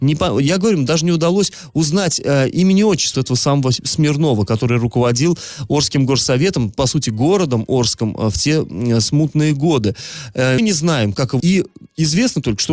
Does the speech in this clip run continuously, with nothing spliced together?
no; 3 cuts; at 3.1 s, 10.6 s, 11.4 s

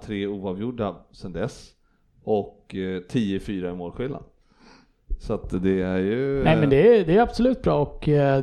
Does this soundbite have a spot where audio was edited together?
no; 0 cuts

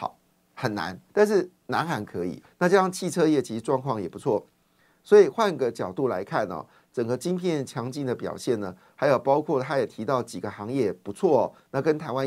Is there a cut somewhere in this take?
yes; 2 cuts; at 1.1 s, 2.4 s

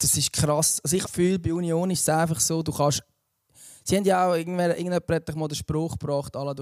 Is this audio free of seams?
no; 1 cut; at 1.0 s

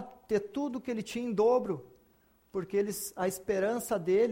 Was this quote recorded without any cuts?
yes; 0 cuts

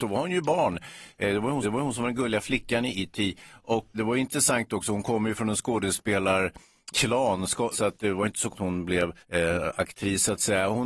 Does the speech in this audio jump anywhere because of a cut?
yes; 6 cuts; at 1.6 s, 3.9 s, 6.9 s, 7.7 s, 8.5 s, 9.2 s

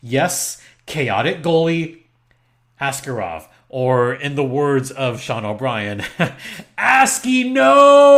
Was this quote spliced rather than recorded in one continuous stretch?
no; 0 cuts

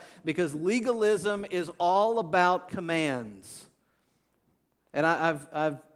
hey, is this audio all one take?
no; 1 cut; at 2.7 s

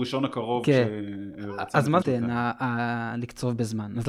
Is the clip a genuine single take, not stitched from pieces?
no; 1 cut; at 2.0 s

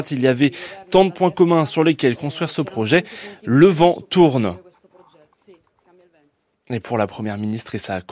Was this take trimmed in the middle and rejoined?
no; 0 cuts

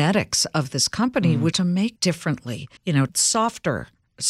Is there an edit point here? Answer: yes; 4 cuts; at 1.5 s, 2.0 s, 2.8 s, 3.1 s

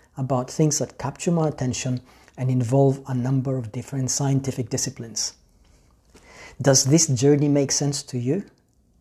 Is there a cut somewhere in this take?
no; 0 cuts

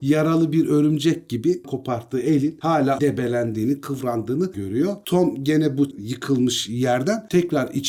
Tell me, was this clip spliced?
yes; 4 cuts; at 1.6 s, 3.0 s, 4.5 s, 5.9 s

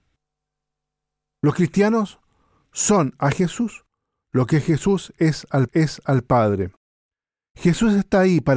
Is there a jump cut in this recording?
yes; 1 cut; at 5.7 s

